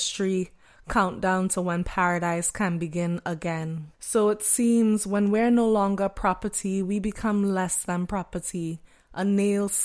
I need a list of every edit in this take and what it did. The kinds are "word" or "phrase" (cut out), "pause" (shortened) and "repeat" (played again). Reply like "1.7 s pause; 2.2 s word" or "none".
3.9 s pause